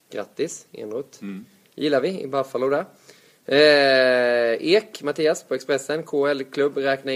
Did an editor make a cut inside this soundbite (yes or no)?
no